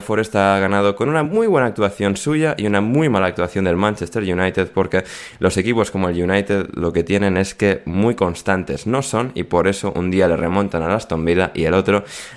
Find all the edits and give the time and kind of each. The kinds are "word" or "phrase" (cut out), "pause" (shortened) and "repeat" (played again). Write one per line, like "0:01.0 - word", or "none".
none

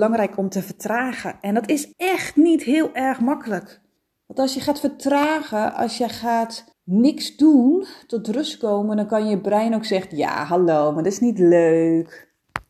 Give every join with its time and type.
0:01.9 - pause
0:04.0 - pause
0:06.7 - pause

